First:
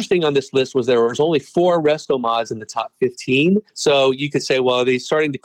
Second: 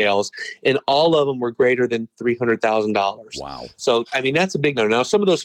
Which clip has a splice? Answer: first; 1 cut; at 3.7 s

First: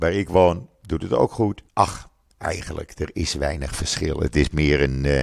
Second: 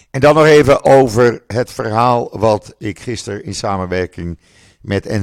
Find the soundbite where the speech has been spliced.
first; 1 cut; at 1.7 s

